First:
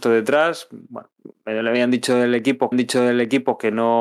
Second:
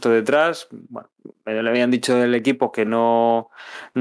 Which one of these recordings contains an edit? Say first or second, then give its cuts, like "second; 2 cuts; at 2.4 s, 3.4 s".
first; 1 cut; at 2.7 s